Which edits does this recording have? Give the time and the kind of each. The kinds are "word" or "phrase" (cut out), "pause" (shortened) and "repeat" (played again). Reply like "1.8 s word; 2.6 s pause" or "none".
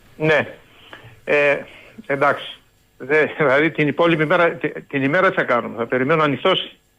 2.8 s pause